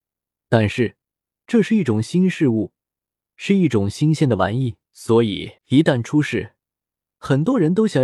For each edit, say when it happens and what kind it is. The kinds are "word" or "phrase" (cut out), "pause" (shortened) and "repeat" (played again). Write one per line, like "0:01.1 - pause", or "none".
0:04.8 - pause
0:05.6 - pause